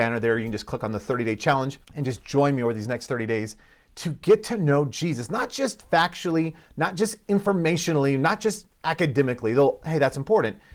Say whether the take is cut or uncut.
cut